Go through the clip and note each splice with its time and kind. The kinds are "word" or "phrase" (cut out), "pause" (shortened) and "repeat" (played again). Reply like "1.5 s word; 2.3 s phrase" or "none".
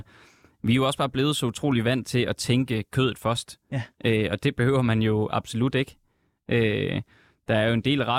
none

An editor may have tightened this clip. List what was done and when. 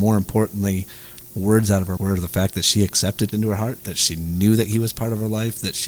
2.0 s word; 3.3 s word

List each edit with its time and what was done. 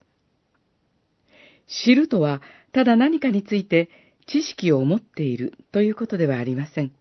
none

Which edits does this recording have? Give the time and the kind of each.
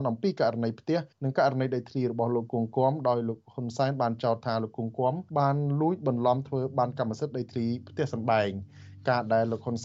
1.1 s pause; 5.3 s pause

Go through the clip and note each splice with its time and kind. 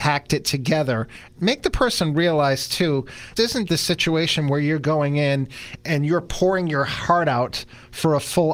3.4 s word; 3.7 s word

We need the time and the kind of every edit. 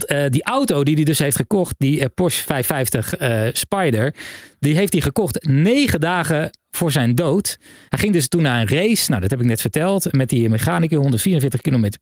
none

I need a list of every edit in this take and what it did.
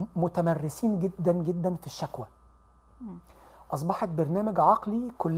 none

